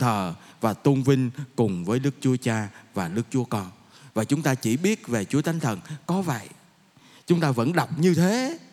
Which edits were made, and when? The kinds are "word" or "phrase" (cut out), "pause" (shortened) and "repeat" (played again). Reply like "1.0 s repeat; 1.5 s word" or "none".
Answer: none